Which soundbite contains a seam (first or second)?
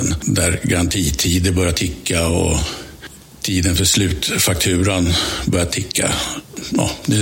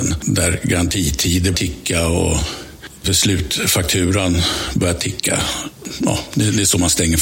second